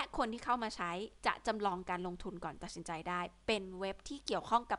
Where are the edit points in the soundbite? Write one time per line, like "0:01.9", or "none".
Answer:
0:01.2